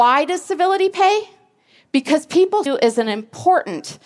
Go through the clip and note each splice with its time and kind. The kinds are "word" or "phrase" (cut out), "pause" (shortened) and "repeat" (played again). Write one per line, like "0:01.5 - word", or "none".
0:02.7 - word